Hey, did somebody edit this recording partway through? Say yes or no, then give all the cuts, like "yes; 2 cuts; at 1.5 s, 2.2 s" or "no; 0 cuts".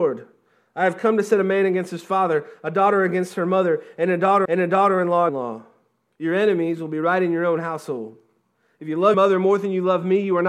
yes; 3 cuts; at 4.4 s, 5.3 s, 9.1 s